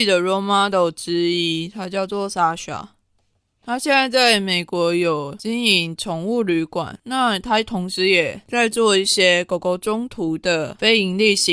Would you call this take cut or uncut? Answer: uncut